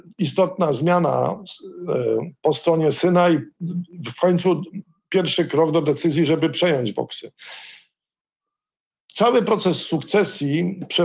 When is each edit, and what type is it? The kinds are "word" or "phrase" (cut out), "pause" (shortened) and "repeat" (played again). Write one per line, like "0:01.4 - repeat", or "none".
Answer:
none